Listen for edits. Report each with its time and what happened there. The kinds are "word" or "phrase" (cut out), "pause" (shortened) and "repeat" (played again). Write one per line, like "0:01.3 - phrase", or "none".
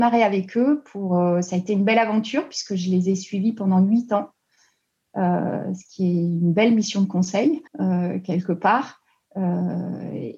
0:07.7 - pause